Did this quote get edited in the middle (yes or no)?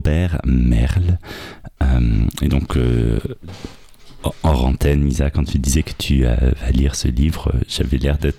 no